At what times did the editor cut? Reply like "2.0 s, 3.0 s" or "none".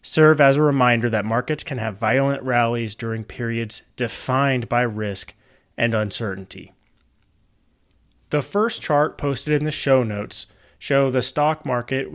none